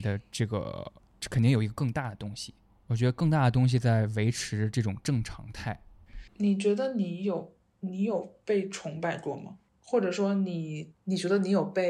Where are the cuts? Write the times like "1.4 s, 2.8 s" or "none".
2.7 s, 6.3 s, 9.7 s